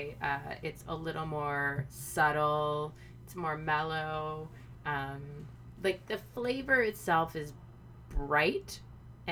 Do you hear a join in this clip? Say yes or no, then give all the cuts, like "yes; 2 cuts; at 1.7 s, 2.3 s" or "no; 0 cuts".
yes; 1 cut; at 5.8 s